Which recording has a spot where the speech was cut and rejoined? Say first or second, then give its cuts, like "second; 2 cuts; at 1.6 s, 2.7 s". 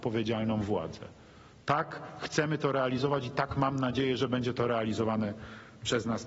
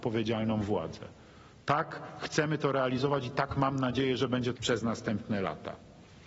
second; 1 cut; at 4.5 s